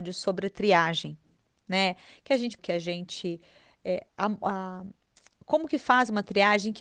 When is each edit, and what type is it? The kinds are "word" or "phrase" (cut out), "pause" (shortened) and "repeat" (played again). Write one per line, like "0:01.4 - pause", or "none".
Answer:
0:02.6 - phrase
0:04.1 - word